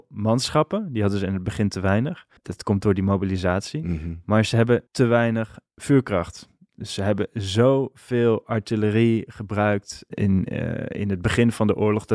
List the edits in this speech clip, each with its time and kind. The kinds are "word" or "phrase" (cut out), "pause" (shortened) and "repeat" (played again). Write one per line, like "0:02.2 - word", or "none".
0:02.4 - pause
0:04.9 - pause
0:10.1 - word